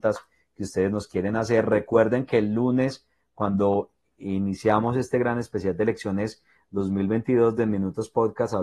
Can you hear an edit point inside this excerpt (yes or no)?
no